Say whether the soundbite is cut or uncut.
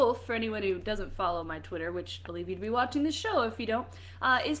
cut